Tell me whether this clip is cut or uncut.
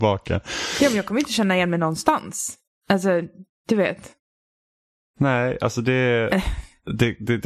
uncut